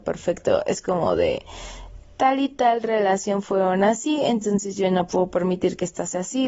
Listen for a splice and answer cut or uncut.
uncut